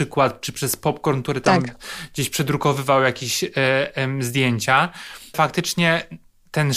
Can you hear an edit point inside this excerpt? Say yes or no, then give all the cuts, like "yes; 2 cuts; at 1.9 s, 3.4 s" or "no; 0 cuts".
yes; 1 cut; at 5.3 s